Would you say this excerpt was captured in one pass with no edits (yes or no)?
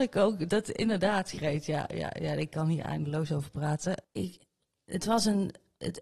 yes